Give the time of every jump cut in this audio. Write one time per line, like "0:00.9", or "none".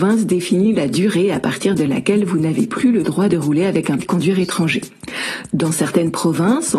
0:04.0